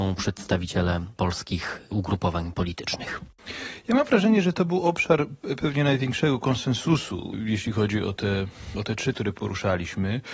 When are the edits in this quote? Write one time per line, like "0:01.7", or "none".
0:09.1